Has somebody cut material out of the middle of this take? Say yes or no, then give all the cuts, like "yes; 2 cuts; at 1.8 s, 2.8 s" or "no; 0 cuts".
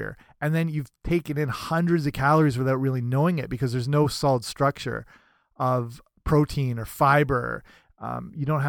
no; 0 cuts